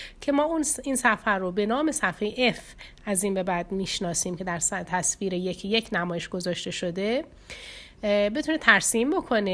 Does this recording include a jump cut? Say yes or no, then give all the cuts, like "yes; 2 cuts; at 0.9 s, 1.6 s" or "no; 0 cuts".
no; 0 cuts